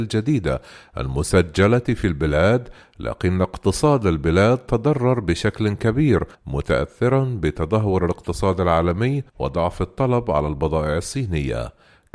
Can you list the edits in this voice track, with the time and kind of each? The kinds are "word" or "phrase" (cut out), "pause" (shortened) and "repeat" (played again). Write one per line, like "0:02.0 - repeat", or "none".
0:06.3 - pause
0:09.3 - pause